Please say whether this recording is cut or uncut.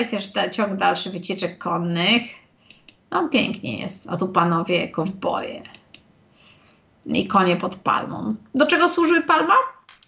uncut